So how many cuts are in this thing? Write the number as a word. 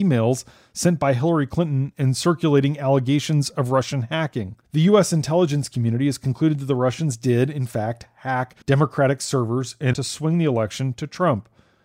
three